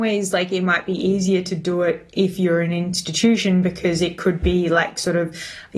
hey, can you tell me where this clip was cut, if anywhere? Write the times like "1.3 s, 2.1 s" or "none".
none